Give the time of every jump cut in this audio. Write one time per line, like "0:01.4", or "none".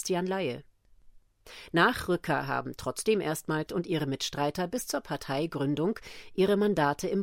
0:03.7